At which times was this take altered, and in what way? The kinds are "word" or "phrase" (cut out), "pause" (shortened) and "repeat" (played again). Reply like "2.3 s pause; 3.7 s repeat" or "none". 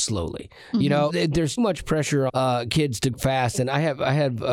1.1 s word; 1.6 s word; 2.3 s word; 3.1 s word